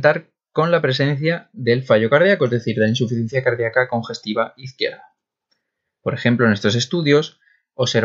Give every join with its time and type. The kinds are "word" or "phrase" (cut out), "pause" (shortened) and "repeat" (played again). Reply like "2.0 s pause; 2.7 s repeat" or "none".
none